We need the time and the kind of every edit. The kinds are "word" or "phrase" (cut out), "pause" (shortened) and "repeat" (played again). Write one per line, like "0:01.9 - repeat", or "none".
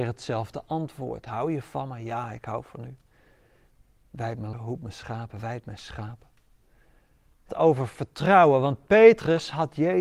0:04.5 - word
0:07.5 - word